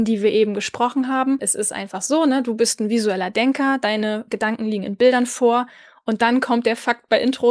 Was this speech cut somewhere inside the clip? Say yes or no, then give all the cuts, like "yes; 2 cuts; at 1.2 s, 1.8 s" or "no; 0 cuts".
no; 0 cuts